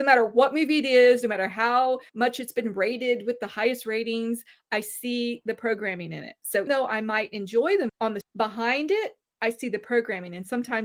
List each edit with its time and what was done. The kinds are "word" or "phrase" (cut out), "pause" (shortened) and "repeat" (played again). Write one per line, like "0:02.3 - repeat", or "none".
0:02.1 - pause
0:06.7 - word
0:07.9 - word
0:08.2 - word